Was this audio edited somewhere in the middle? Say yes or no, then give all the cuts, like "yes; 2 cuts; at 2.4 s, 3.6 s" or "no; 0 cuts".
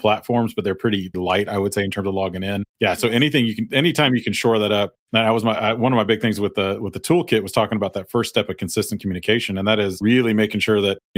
yes; 1 cut; at 1.1 s